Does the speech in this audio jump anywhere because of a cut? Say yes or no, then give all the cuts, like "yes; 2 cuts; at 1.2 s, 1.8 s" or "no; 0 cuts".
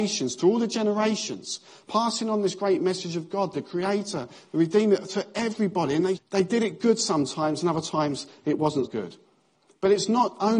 yes; 2 cuts; at 6.2 s, 8.9 s